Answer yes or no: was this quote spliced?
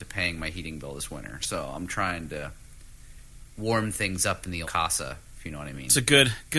yes